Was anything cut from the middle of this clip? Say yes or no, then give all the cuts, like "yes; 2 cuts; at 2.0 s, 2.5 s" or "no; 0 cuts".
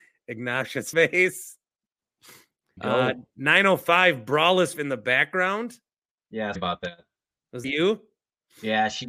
yes; 5 cuts; at 0.9 s, 2.8 s, 4.7 s, 6.5 s, 7.6 s